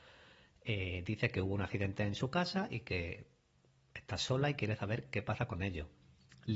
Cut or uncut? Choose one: uncut